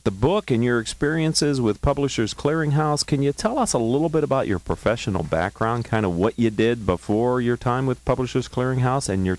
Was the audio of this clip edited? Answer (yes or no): no